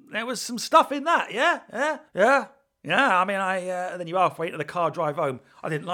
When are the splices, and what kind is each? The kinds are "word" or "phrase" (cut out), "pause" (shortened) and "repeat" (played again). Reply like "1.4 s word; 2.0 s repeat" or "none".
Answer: 2.1 s pause